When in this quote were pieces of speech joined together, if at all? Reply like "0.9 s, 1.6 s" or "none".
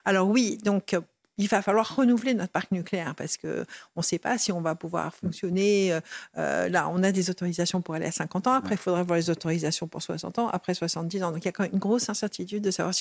none